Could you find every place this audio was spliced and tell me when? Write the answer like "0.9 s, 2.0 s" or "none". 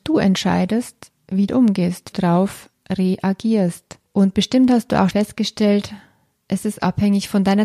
1.5 s, 2.1 s, 4.1 s, 5.1 s